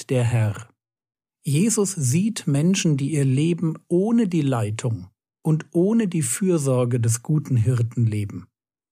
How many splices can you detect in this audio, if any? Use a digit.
0